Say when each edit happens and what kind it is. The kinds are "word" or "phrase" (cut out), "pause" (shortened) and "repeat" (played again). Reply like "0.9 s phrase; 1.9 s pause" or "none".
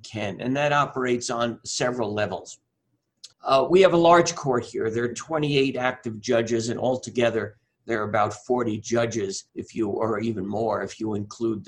3.3 s pause; 9.5 s pause